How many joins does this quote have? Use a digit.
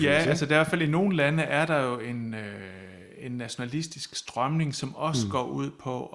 0